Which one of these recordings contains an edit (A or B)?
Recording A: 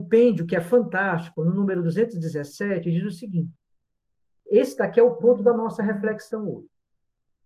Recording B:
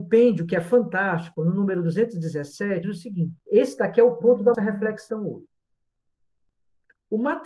B